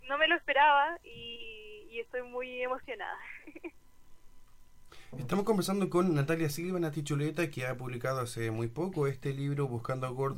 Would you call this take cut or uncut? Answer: uncut